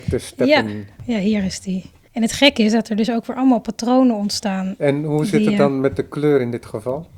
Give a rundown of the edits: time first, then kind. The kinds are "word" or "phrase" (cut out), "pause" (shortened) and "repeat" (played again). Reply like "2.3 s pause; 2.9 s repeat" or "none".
none